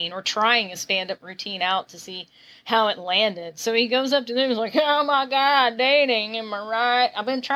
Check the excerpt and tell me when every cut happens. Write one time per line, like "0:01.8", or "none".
none